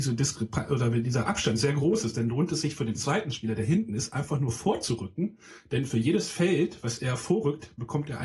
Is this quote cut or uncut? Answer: uncut